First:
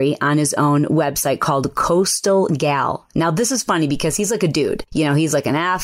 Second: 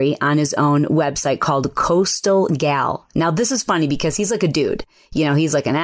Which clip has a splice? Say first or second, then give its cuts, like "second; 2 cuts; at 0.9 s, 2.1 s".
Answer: first; 1 cut; at 4.9 s